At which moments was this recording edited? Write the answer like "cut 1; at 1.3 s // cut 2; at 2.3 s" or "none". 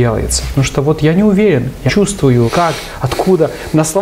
cut 1; at 1.9 s // cut 2; at 2.5 s